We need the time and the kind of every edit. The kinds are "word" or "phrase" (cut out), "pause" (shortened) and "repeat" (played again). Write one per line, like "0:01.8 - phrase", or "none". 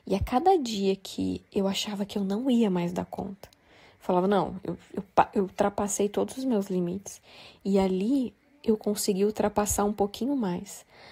none